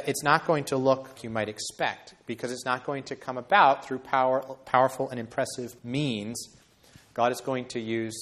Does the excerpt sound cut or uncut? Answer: cut